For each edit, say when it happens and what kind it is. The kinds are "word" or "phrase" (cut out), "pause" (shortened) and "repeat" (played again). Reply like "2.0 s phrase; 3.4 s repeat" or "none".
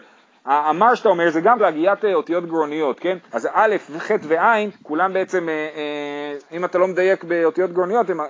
1.6 s phrase; 3.3 s pause; 4.7 s pause; 6.4 s pause